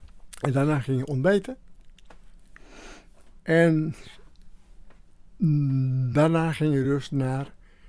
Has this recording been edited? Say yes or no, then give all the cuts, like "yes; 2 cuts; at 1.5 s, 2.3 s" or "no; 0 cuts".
no; 0 cuts